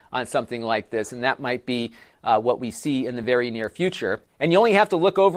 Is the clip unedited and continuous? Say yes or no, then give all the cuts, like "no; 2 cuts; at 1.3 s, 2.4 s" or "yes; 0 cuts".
yes; 0 cuts